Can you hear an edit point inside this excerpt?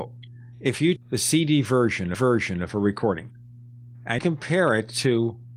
yes; 3 cuts; at 1.0 s, 2.1 s, 4.2 s

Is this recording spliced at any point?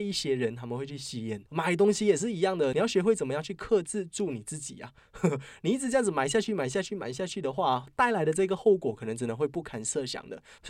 yes; 1 cut; at 1.5 s

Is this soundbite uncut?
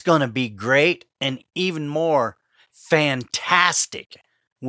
no; 1 cut; at 1.1 s

